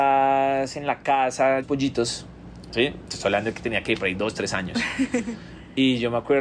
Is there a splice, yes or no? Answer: yes